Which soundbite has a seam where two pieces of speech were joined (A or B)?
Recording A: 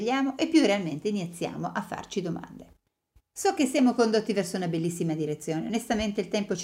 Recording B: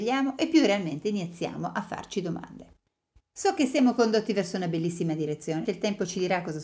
B